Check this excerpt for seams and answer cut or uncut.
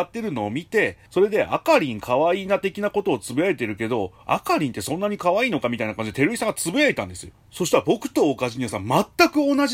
cut